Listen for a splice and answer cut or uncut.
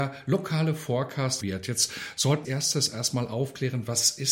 cut